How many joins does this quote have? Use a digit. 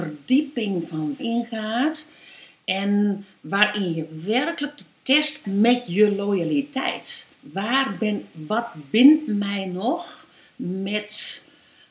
3